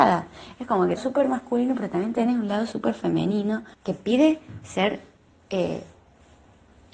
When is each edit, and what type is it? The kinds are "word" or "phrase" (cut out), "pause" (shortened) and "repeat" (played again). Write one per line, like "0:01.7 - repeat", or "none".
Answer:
0:01.0 - phrase
0:03.7 - pause